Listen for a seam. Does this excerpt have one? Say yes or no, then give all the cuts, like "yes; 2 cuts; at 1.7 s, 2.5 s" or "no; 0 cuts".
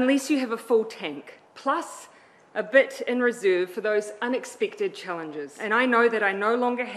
yes; 1 cut; at 1.5 s